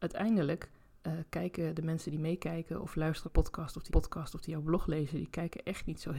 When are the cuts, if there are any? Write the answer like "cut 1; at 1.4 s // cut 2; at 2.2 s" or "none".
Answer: cut 1; at 3.2 s // cut 2; at 3.9 s